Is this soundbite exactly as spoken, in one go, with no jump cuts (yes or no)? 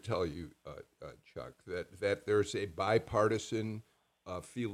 yes